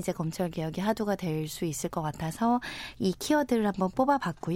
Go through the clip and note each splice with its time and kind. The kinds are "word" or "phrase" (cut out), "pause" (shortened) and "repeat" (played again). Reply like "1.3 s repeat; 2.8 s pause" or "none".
none